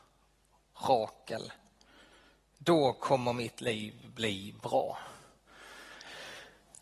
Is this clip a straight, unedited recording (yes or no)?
yes